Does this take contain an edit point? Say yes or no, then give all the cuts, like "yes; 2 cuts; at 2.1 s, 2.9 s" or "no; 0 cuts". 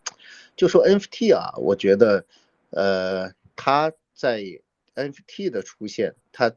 no; 0 cuts